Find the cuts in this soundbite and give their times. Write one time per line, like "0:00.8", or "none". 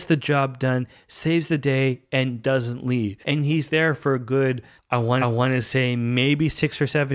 0:03.2
0:04.8
0:05.2